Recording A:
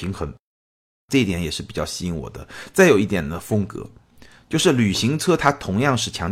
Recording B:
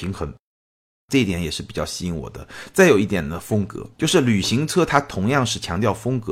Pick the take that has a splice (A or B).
B